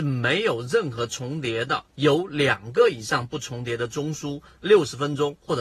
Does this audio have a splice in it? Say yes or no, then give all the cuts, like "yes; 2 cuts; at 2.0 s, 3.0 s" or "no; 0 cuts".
yes; 1 cut; at 1.9 s